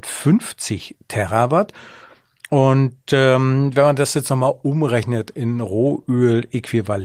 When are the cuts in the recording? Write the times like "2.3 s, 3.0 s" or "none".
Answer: none